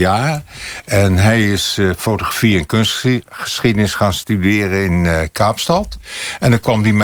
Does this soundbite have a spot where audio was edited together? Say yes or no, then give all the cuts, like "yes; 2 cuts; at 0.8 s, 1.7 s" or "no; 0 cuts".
no; 0 cuts